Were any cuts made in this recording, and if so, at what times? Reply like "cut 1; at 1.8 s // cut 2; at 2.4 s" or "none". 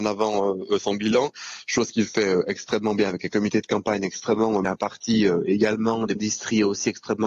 cut 1; at 4.6 s // cut 2; at 6.2 s